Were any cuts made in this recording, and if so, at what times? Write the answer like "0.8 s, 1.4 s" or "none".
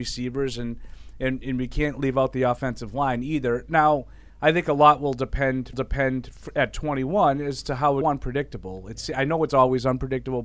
4.3 s, 5.7 s, 8.0 s